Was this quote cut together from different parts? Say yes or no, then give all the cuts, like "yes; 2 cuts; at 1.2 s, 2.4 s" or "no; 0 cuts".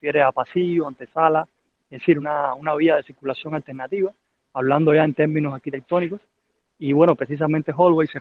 no; 0 cuts